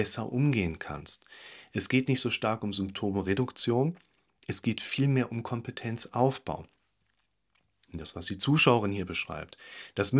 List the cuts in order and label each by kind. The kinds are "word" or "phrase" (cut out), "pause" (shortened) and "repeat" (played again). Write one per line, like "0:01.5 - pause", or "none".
none